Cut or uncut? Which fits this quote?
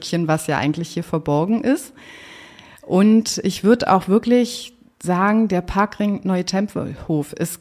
uncut